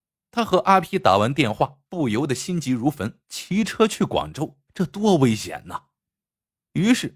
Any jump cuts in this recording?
yes; 3 cuts; at 1.9 s, 3.2 s, 4.7 s

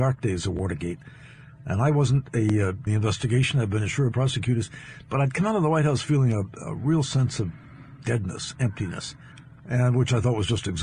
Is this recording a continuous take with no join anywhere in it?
no; 3 cuts; at 2.9 s, 4.1 s, 9.3 s

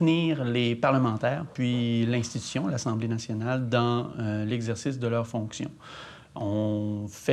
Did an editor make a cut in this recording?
no; 0 cuts

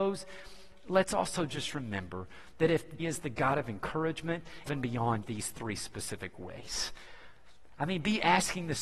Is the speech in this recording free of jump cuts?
no; 3 cuts; at 3.0 s, 4.7 s, 5.2 s

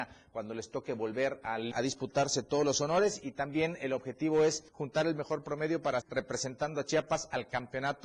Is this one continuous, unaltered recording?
no; 3 cuts; at 1.7 s, 4.7 s, 6.0 s

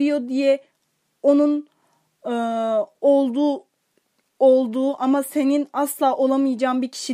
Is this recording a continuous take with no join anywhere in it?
yes; 0 cuts

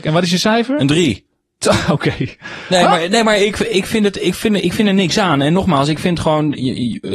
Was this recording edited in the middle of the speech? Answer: no; 0 cuts

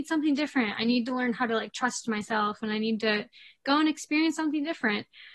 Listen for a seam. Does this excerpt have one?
no; 0 cuts

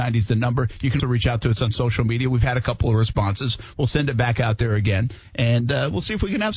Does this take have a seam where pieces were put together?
yes; 1 cut; at 1.0 s

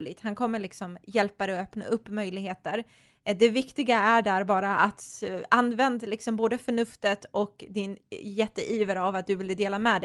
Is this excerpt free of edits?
yes; 0 cuts

